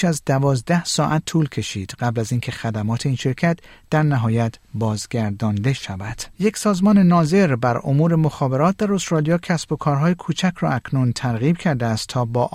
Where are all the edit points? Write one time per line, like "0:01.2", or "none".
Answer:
0:06.3